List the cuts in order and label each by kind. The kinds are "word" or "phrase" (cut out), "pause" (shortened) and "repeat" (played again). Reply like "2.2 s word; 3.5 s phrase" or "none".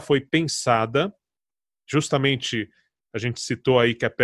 none